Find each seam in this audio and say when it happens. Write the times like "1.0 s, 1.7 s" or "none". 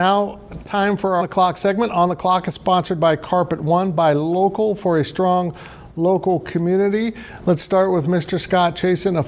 1.2 s